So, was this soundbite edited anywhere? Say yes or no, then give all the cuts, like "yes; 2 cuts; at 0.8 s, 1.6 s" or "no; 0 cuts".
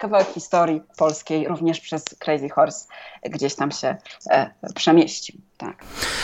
no; 0 cuts